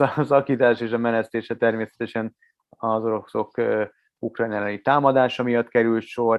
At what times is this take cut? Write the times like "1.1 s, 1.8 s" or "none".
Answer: none